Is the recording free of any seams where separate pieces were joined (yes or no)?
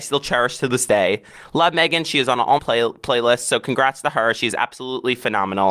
no